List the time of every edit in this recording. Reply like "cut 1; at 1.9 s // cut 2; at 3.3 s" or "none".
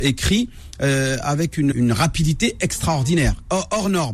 cut 1; at 1.7 s